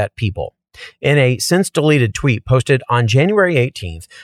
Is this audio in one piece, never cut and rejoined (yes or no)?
yes